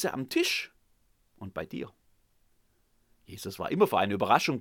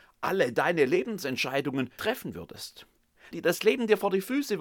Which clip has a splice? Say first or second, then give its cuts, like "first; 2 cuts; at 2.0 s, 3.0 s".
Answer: second; 2 cuts; at 2.0 s, 3.3 s